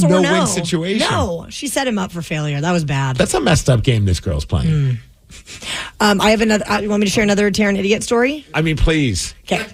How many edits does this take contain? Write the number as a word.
one